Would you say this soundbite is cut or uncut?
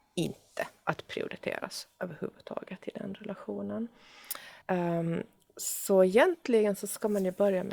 cut